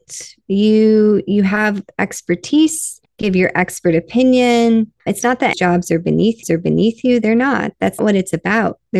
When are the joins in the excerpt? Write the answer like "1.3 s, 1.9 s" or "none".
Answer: 3.0 s, 5.0 s, 5.5 s, 6.4 s, 8.0 s

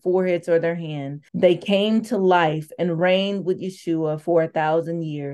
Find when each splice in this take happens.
1.3 s

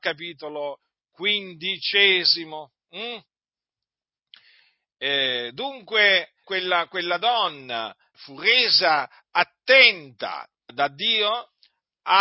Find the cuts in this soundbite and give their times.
6.4 s, 8.1 s, 10.7 s

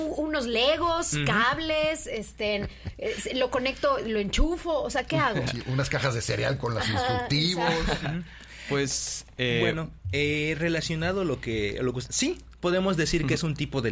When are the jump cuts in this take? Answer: 12.1 s

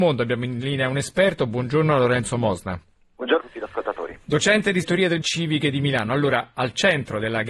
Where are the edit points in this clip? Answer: 3.4 s, 4.8 s, 5.2 s

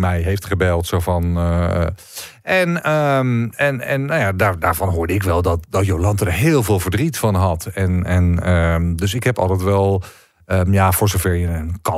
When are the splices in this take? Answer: none

